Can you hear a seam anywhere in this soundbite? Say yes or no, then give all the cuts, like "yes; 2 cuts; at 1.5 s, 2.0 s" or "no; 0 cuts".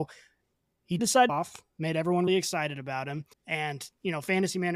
yes; 4 cuts; at 1.0 s, 1.3 s, 2.3 s, 3.3 s